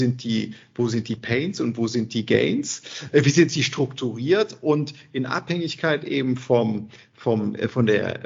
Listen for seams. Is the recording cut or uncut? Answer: uncut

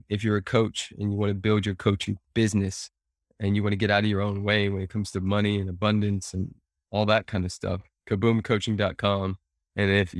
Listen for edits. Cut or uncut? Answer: uncut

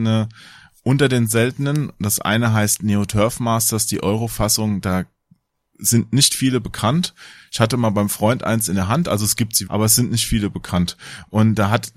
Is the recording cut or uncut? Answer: cut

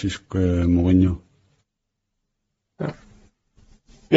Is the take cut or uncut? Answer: uncut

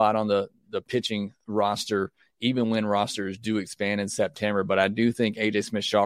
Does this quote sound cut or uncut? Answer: uncut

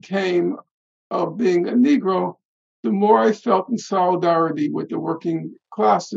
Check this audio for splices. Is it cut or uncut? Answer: uncut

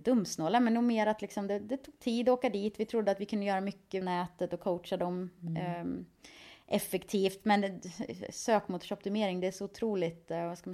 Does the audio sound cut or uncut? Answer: cut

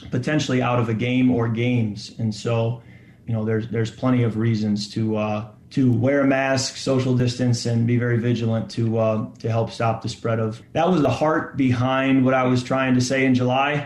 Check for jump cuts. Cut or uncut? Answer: cut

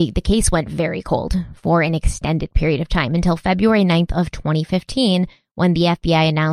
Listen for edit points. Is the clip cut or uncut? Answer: uncut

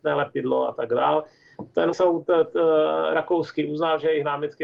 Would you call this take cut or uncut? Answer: cut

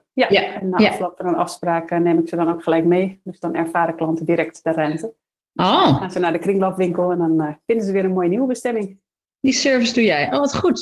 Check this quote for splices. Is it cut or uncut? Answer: uncut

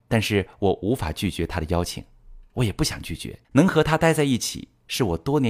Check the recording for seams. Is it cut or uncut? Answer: cut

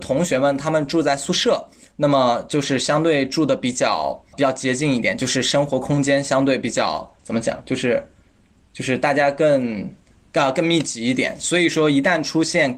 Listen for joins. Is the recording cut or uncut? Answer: cut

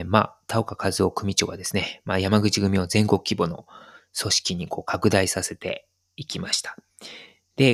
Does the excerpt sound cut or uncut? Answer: uncut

